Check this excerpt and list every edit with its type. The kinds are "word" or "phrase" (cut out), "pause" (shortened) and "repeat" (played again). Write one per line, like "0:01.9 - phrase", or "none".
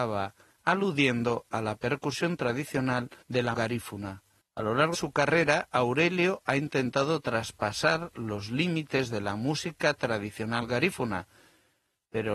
0:03.2 - pause
0:03.5 - word
0:04.4 - pause
0:04.9 - word